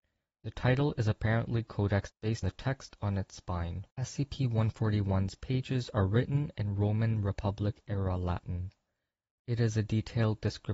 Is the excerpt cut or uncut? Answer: cut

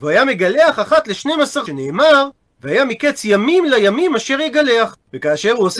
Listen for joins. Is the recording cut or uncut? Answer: cut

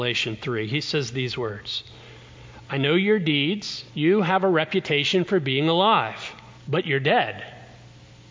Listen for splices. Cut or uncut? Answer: cut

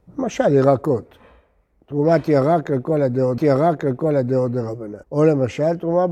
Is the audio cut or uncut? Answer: cut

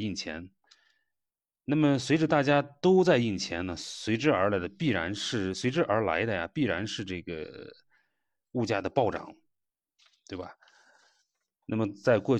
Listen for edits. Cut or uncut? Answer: uncut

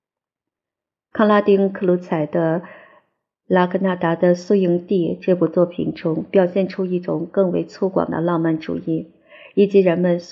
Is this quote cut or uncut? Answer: uncut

